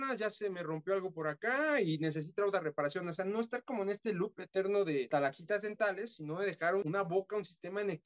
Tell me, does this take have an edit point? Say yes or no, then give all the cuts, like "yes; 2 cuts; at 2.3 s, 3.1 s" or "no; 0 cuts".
no; 0 cuts